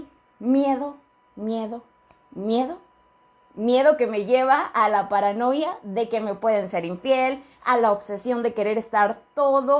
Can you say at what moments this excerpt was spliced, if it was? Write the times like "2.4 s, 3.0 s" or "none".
none